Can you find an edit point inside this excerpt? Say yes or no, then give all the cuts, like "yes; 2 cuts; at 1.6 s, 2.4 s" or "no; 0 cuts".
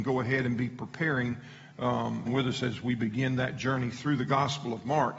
yes; 1 cut; at 2.2 s